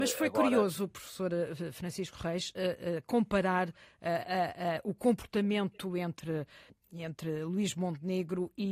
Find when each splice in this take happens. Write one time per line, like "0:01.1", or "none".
none